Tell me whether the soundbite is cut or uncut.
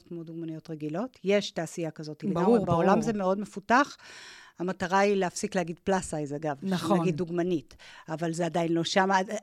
uncut